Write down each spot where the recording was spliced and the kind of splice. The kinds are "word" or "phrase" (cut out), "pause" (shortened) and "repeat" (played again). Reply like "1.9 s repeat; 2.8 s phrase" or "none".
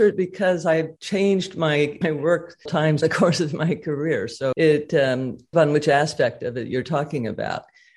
1.0 s pause; 2.0 s word; 2.7 s word; 3.0 s word; 4.5 s word; 5.5 s word

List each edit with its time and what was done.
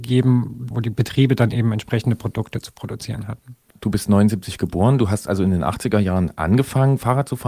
none

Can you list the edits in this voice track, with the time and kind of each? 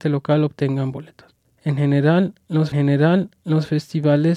2.7 s repeat

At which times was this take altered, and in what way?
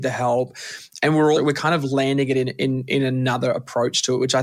1.3 s word

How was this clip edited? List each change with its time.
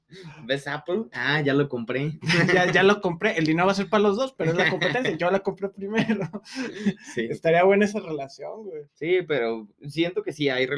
8.9 s pause

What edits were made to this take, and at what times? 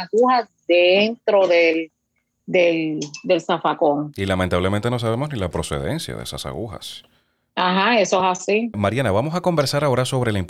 none

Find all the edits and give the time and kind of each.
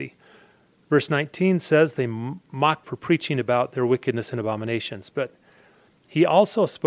2.8 s word

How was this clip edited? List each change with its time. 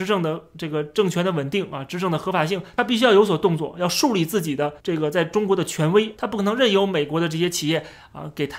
4.8 s pause

